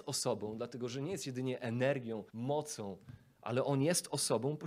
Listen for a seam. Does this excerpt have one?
yes; 1 cut; at 2.3 s

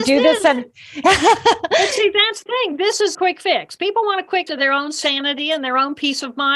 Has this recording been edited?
yes; 3 cuts; at 2.5 s, 3.1 s, 4.5 s

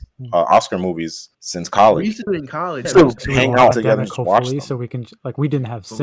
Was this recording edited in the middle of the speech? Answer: yes; 5 cuts; at 1.3 s, 2.3 s, 2.8 s, 3.2 s, 3.7 s

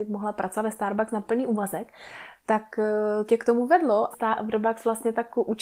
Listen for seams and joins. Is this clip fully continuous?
no; 2 cuts; at 3.3 s, 4.1 s

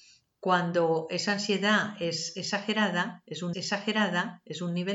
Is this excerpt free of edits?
no; 1 cut; at 3.5 s

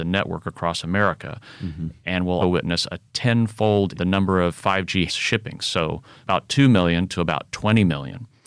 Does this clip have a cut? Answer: yes; 4 cuts; at 2.4 s, 3.9 s, 5.1 s, 6.2 s

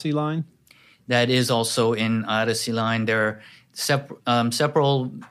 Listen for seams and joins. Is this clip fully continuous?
yes; 0 cuts

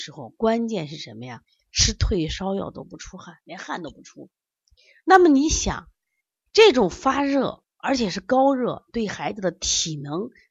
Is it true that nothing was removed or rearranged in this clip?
yes; 0 cuts

